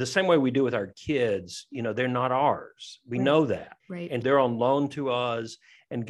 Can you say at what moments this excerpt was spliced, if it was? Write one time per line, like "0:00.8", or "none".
0:03.8
0:04.2